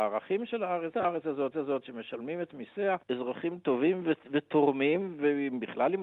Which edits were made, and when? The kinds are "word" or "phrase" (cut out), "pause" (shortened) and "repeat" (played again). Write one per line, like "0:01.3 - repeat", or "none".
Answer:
0:00.9 - phrase
0:01.5 - repeat
0:03.0 - pause

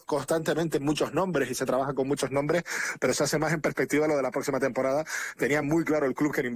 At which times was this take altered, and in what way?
none

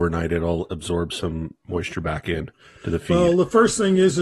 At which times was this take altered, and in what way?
none

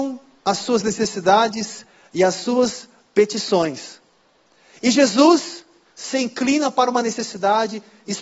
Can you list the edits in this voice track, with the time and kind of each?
none

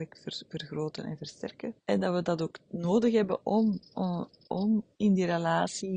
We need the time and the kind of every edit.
0:01.8 - pause
0:04.9 - pause

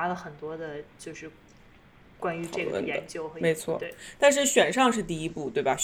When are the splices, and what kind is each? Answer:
none

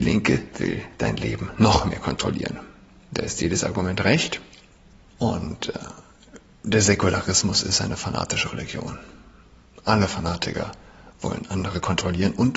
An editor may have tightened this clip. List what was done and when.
none

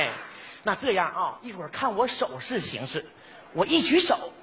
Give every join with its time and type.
none

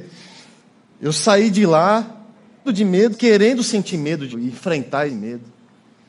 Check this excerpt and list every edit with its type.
0:02.7 - word
0:03.1 - word
0:03.9 - word
0:04.3 - word
0:05.1 - word

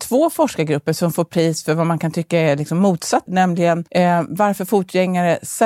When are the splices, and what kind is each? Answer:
0:03.3 - word
0:03.9 - pause

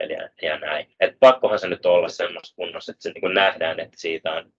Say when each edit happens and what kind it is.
0:00.9 - pause

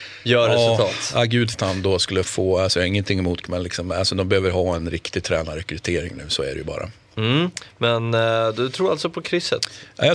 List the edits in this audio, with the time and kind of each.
0:01.5 - word
0:02.2 - word
0:03.4 - word

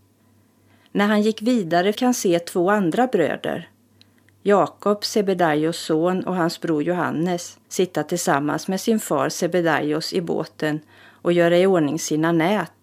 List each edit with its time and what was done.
0:01.9 - word
0:07.6 - pause

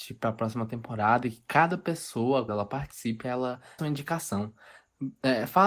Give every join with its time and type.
0:02.5 - word
0:03.8 - word

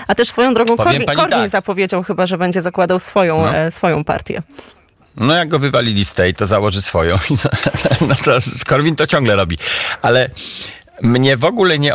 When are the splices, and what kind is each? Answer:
none

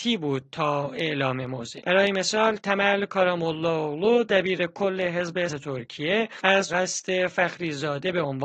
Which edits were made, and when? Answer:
0:05.5 - word
0:06.7 - word

